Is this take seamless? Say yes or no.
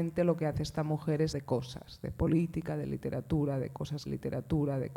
no